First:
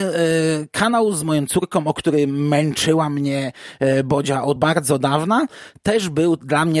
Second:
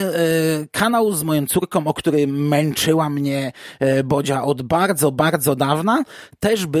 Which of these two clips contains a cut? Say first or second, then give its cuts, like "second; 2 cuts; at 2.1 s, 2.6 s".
first; 1 cut; at 4.6 s